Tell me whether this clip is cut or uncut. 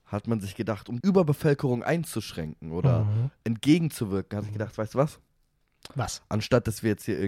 cut